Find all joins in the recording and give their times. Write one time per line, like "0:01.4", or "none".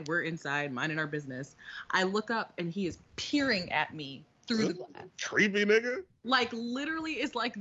none